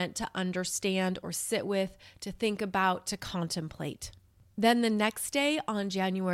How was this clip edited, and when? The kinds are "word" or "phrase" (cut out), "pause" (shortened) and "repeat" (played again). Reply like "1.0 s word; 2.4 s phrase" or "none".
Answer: none